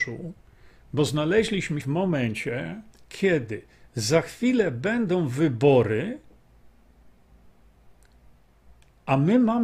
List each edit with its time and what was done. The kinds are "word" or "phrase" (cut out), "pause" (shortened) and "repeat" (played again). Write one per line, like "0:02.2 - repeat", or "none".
0:01.8 - word
0:02.9 - pause